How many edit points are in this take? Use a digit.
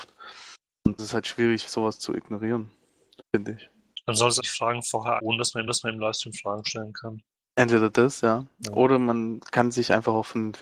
4